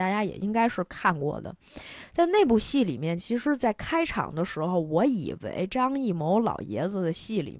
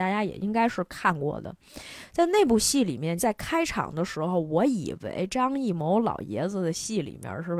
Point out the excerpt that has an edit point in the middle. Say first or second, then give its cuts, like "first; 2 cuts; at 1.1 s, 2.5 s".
second; 1 cut; at 3.2 s